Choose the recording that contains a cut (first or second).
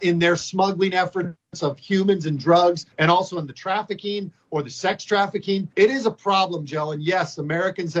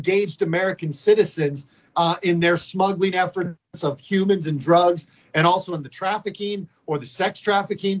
first